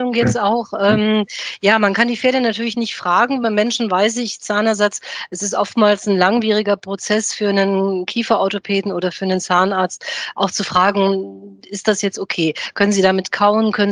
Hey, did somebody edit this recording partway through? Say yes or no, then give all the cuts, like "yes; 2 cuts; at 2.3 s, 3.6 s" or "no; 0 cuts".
no; 0 cuts